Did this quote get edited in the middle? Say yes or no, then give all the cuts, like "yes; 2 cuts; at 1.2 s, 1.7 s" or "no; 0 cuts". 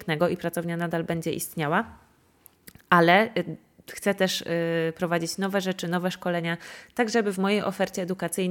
no; 0 cuts